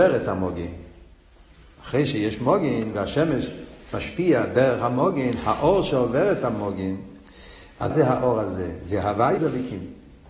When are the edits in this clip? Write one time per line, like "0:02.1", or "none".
0:07.9
0:09.4